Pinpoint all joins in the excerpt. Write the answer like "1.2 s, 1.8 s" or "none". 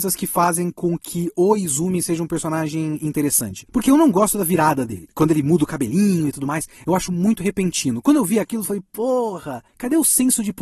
none